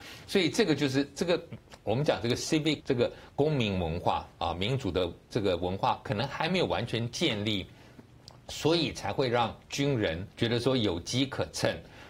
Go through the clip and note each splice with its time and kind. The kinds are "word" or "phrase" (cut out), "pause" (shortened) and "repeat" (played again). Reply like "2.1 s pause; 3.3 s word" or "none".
2.8 s word; 10.3 s pause